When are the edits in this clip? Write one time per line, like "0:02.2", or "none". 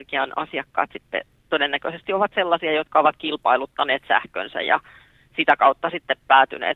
none